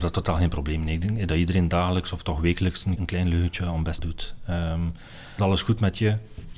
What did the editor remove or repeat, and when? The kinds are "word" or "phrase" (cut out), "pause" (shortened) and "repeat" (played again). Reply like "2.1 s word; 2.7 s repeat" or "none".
1.3 s word; 3.0 s word; 4.0 s word; 5.4 s word